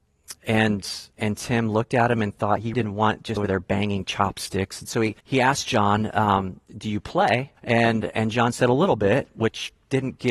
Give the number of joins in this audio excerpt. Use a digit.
6